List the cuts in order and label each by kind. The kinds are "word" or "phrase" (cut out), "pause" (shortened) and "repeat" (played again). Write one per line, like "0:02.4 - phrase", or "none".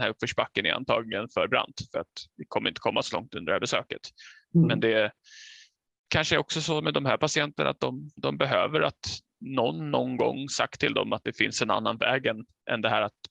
none